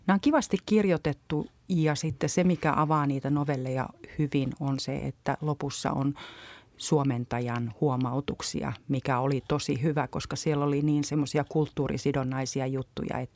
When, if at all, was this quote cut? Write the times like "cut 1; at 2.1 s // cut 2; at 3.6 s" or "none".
none